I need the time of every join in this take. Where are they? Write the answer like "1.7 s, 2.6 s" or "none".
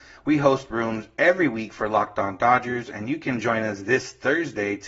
none